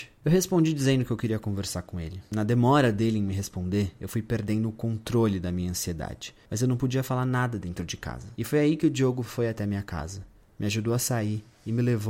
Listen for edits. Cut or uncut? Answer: uncut